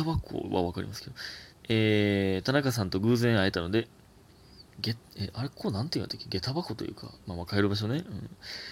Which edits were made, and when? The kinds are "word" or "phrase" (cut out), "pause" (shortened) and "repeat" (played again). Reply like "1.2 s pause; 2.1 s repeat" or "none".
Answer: 1.6 s word; 4.7 s pause; 7.2 s pause